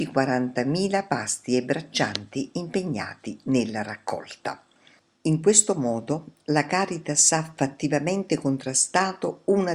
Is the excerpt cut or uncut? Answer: uncut